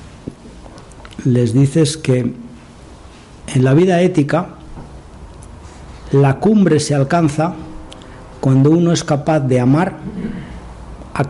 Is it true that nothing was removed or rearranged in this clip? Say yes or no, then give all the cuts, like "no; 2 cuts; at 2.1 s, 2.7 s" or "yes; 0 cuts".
yes; 0 cuts